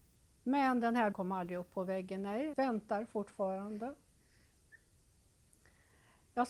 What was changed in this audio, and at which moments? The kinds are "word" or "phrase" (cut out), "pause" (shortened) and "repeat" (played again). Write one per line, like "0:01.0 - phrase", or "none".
0:01.1 - word
0:02.5 - word